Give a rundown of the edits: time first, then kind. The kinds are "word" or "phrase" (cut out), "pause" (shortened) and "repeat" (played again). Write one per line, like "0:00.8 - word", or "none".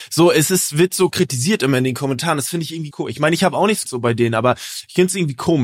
0:01.1 - word
0:02.9 - word
0:03.8 - word